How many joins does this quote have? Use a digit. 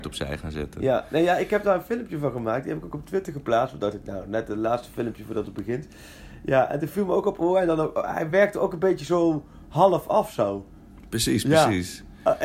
0